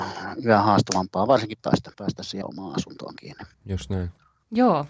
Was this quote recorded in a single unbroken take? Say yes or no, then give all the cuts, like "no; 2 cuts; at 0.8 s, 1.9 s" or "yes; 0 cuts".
no; 4 cuts; at 1.6 s, 1.9 s, 2.4 s, 3.5 s